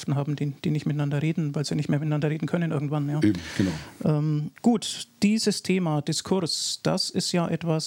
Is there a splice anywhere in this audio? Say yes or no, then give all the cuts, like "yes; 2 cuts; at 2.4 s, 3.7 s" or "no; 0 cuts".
yes; 1 cut; at 4.6 s